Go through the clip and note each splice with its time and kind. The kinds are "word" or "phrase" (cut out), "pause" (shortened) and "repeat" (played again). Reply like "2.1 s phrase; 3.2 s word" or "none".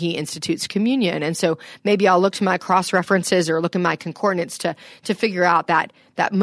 none